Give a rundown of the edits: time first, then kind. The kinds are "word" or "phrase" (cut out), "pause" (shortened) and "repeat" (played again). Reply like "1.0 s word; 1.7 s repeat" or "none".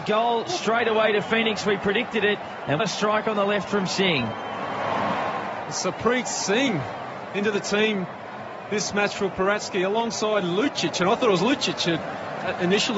2.8 s word